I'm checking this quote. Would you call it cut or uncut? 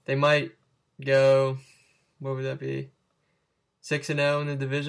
uncut